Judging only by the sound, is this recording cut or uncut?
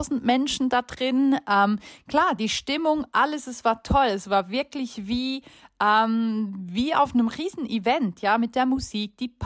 uncut